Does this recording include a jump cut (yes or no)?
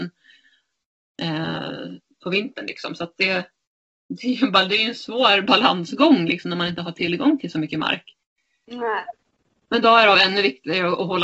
no